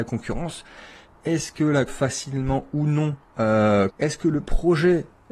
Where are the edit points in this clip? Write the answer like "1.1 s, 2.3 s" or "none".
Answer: 1.9 s, 3.9 s